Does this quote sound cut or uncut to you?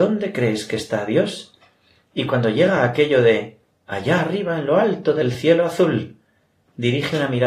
uncut